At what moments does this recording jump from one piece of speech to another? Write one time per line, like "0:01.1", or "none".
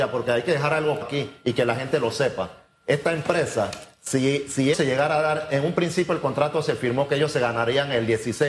0:01.0
0:04.7